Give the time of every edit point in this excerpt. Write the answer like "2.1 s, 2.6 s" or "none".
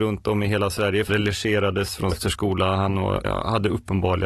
1.1 s, 2.1 s, 3.2 s

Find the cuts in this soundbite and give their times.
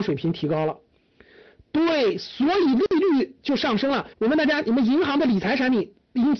4.1 s

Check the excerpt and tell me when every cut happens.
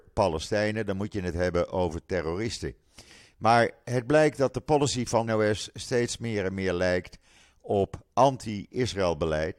5.3 s

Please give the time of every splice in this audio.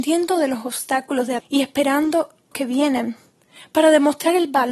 1.4 s, 2.5 s

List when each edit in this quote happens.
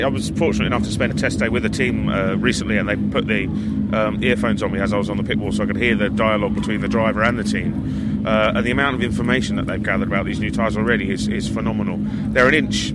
1.1 s

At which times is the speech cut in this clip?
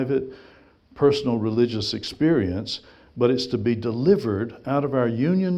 none

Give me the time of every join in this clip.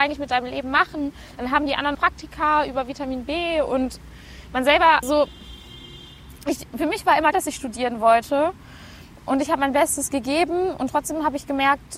1.9 s, 5.0 s, 7.3 s

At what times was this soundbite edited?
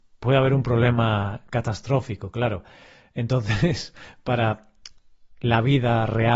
none

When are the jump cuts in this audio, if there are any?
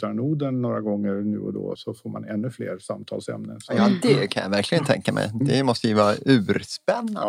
1.8 s

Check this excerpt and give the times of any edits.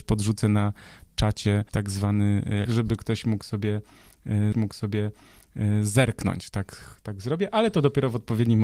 1.7 s, 2.7 s, 4.5 s, 7.0 s

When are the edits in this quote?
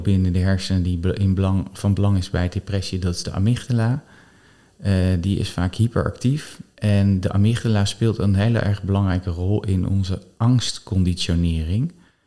none

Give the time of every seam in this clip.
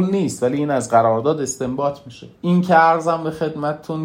2.3 s

